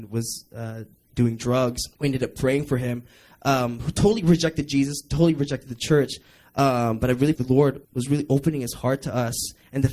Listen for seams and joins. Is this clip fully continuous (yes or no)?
no